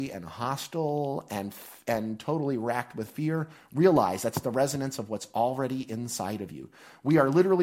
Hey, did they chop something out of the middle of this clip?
no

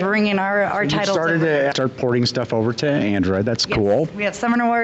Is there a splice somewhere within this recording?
yes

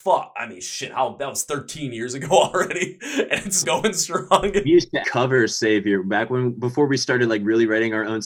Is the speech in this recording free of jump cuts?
no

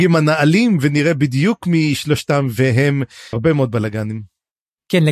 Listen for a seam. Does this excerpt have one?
yes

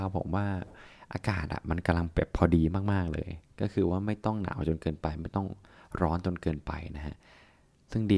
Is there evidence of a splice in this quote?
no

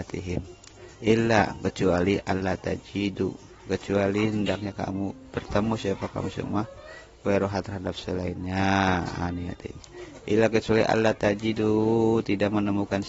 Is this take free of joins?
no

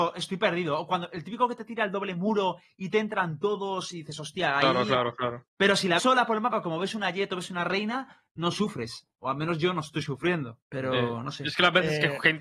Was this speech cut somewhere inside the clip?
yes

